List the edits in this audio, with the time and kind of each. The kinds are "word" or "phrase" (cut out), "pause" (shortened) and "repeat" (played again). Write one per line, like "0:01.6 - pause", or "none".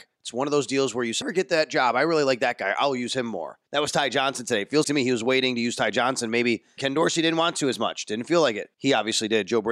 0:01.2 - phrase
0:03.7 - pause
0:04.8 - word
0:06.8 - word
0:08.7 - pause